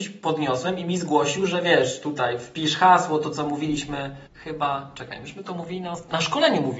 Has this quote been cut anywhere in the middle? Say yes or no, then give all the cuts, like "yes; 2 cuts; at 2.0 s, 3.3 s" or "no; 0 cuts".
yes; 1 cut; at 4.3 s